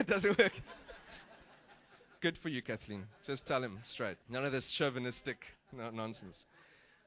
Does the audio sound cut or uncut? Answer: cut